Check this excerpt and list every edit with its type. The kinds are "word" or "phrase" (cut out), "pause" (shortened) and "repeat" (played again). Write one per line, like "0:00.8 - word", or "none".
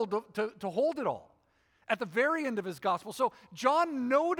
none

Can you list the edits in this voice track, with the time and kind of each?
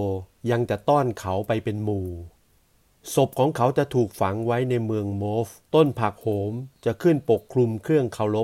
0:05.6 - pause

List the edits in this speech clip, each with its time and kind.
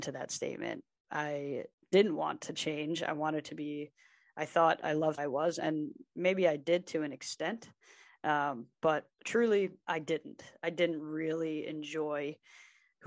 0:05.2 - phrase
0:09.1 - pause

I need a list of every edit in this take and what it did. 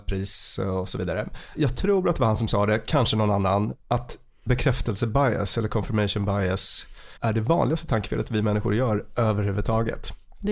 0:03.8 - pause
0:07.2 - pause

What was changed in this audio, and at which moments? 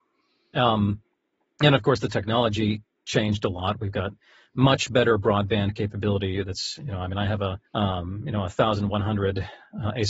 0:07.7 - pause

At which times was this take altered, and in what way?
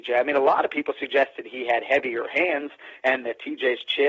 none

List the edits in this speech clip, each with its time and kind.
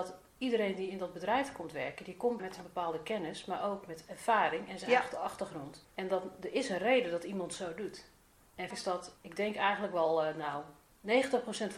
0:02.4 - word
0:08.7 - word

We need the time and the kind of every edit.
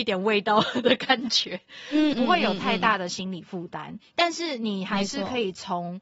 0:02.1 - word

